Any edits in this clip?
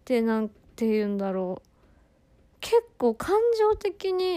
no; 0 cuts

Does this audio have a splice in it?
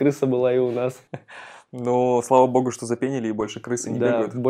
no; 0 cuts

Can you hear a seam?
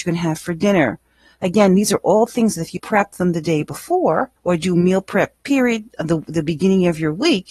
yes; 2 cuts; at 2.8 s, 4.4 s

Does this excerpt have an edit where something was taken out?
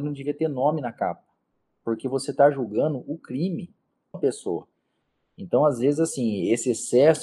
yes; 1 cut; at 4.1 s

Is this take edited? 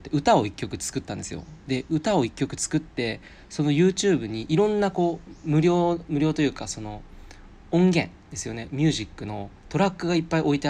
yes; 1 cut; at 9.6 s

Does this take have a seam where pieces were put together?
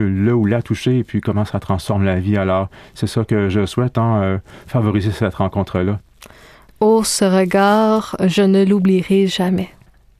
no; 0 cuts

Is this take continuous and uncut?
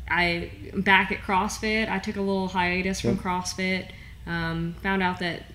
yes; 0 cuts

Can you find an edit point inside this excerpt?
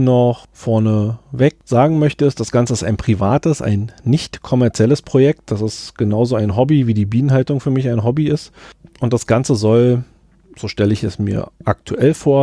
no; 0 cuts

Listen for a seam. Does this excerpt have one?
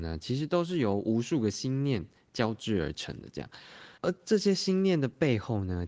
yes; 1 cut; at 4.0 s

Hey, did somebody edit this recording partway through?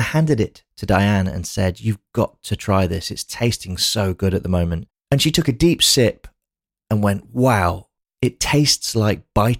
no; 0 cuts

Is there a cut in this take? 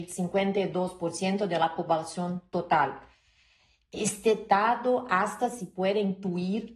no; 0 cuts

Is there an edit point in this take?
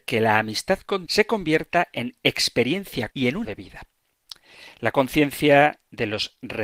yes; 3 cuts; at 1.1 s, 3.1 s, 3.4 s

